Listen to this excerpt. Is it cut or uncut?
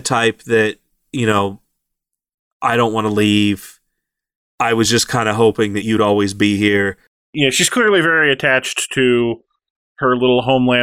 uncut